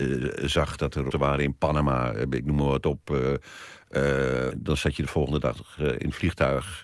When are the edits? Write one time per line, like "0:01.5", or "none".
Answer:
0:01.1
0:04.5